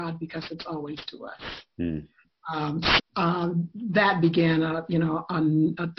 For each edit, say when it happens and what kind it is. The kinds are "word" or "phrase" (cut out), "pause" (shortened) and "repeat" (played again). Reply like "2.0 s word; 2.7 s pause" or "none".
1.1 s word; 3.0 s word